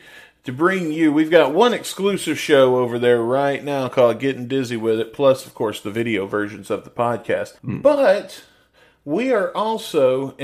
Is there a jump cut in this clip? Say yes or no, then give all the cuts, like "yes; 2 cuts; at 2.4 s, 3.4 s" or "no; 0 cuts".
yes; 1 cut; at 7.6 s